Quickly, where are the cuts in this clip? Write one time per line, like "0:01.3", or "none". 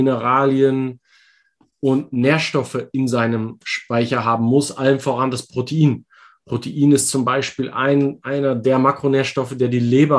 none